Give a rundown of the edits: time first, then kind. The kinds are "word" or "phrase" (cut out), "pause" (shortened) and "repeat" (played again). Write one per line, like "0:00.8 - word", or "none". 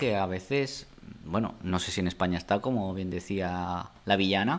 none